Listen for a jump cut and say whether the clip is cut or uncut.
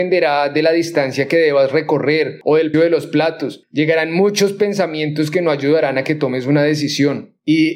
cut